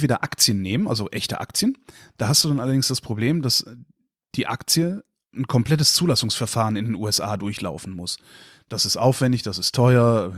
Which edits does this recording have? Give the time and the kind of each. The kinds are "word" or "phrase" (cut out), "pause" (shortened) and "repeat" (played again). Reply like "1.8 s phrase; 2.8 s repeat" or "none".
none